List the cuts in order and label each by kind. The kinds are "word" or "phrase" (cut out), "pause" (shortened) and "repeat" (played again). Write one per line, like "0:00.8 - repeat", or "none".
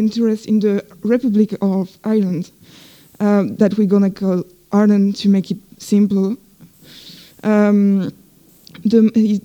none